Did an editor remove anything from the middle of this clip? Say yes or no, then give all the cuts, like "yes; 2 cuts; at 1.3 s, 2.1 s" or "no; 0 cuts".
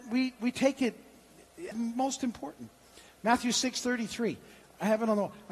yes; 1 cut; at 1.7 s